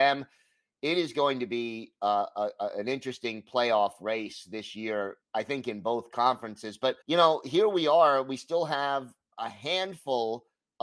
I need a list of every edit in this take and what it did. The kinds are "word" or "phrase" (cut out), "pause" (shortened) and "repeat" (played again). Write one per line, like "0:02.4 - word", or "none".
0:05.2 - pause
0:07.0 - pause